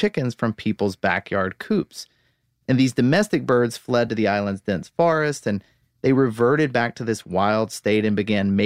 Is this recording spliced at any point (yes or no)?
no